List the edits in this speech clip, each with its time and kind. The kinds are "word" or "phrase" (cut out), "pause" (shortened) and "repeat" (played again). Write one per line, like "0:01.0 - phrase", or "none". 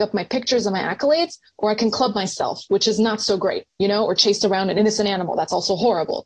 none

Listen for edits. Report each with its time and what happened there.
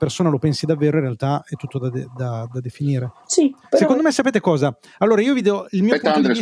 0:03.2 - pause

